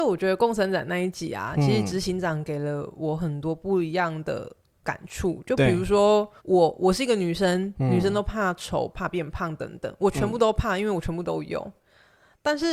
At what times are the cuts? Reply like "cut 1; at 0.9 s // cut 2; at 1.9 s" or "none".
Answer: cut 1; at 6.4 s // cut 2; at 8.9 s